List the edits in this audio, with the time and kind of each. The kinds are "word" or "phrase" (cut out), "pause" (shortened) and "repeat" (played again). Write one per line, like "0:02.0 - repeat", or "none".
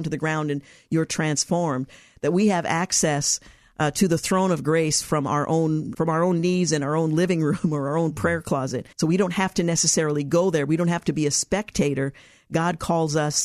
0:05.9 - word
0:08.9 - pause